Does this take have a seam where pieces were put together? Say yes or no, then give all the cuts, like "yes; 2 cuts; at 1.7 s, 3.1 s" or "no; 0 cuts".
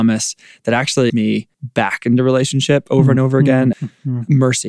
yes; 3 cuts; at 1.1 s, 1.5 s, 3.7 s